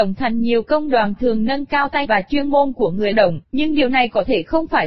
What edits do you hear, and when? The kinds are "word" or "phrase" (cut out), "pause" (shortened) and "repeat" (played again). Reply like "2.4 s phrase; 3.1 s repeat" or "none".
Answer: 1.2 s phrase; 2.0 s word; 3.1 s word; 3.4 s pause

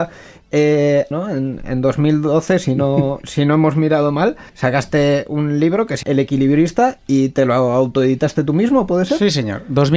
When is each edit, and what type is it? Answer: 1.1 s word; 4.5 s pause; 6.0 s word

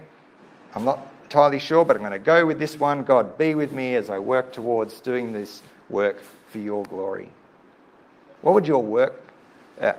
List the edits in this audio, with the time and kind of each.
none

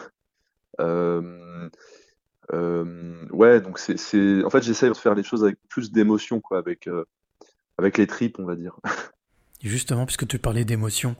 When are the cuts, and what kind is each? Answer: 4.9 s word; 5.6 s word; 6.4 s word

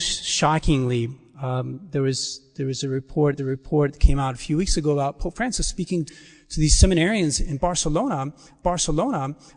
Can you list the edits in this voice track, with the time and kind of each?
3.4 s repeat; 6.1 s word; 8.6 s repeat

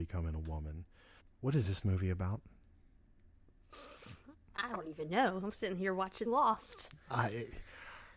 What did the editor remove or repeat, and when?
1.2 s pause; 4.3 s pause; 6.3 s phrase

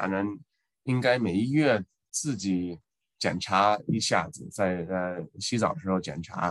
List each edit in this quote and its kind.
none

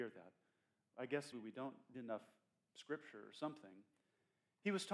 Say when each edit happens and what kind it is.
1.3 s word; 1.9 s word

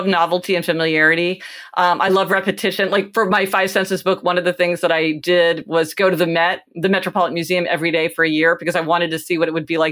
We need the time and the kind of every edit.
none

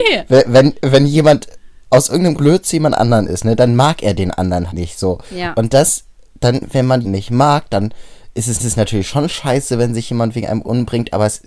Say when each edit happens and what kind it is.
1.8 s pause; 2.3 s word; 4.7 s word; 7.0 s word; 8.6 s repeat

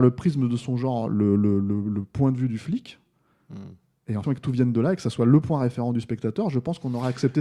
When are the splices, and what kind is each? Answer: 4.2 s phrase

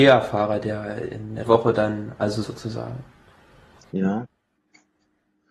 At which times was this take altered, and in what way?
1.5 s word; 2.4 s phrase

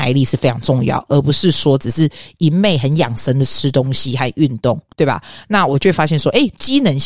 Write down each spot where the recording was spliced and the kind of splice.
4.9 s pause

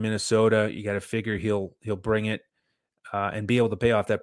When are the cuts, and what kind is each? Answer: none

